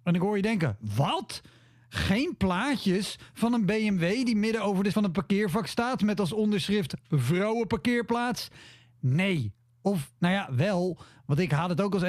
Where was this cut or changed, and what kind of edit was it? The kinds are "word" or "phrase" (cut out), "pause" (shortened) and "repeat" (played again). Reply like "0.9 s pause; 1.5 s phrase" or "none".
4.9 s word

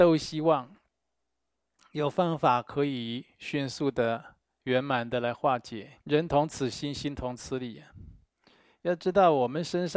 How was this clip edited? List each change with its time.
6.0 s pause

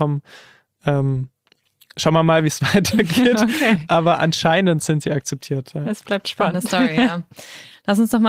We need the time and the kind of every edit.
none

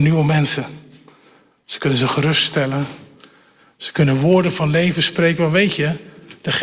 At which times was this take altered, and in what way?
none

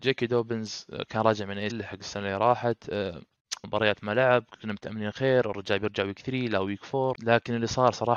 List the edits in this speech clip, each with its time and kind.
1.7 s word; 3.6 s word

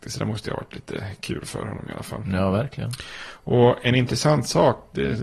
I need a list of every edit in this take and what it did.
none

